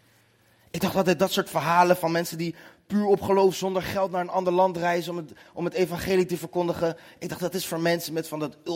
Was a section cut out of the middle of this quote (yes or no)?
no